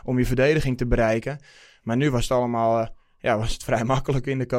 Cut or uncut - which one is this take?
uncut